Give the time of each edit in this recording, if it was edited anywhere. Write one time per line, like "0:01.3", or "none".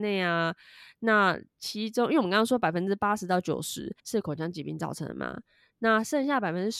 0:01.5
0:04.0